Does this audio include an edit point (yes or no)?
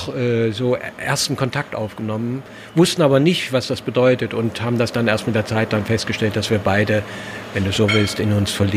no